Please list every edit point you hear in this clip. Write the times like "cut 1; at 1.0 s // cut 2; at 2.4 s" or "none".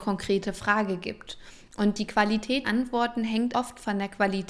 cut 1; at 2.6 s // cut 2; at 3.5 s